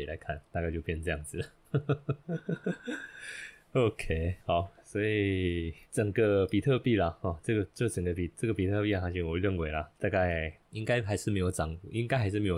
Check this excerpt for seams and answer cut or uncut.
cut